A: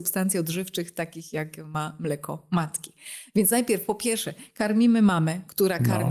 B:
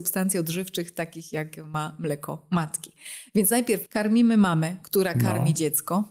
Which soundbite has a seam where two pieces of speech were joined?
B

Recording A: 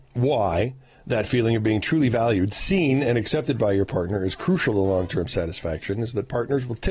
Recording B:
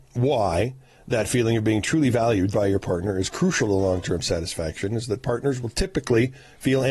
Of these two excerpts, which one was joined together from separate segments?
B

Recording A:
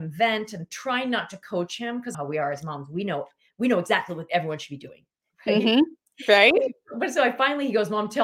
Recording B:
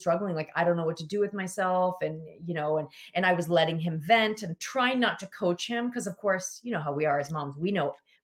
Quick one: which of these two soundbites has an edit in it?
A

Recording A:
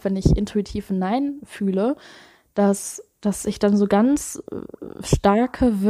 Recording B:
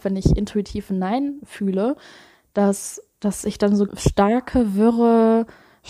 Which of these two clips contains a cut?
B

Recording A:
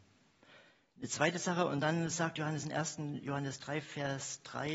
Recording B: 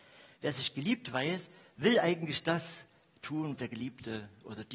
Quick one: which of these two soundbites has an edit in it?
B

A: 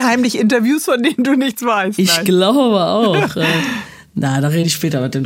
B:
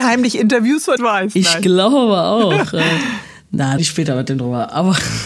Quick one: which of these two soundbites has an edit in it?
B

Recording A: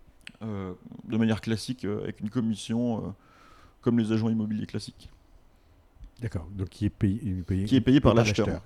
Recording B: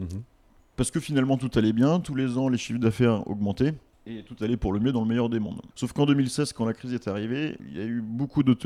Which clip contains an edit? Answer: B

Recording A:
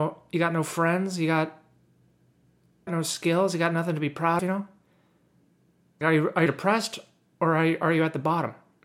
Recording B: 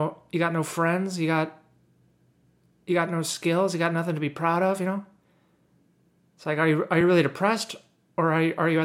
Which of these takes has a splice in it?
A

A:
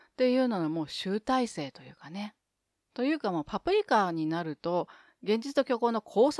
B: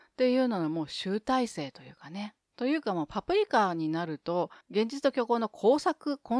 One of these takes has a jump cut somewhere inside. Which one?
B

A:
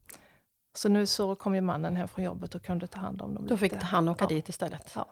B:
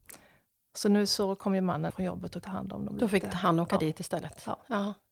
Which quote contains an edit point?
B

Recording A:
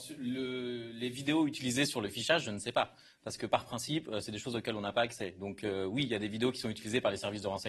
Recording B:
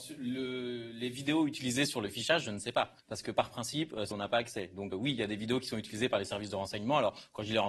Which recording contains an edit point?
B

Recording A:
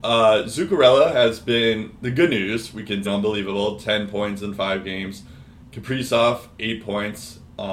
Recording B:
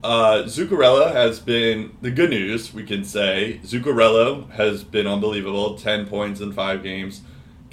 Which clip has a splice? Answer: A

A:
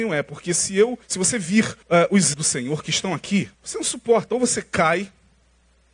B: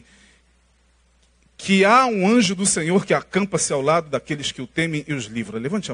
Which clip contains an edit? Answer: A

